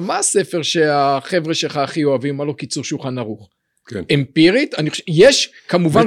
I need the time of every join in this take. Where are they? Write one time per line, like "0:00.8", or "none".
none